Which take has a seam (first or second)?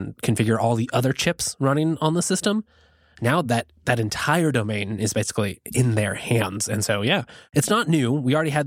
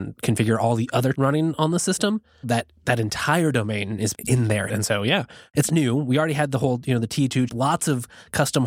second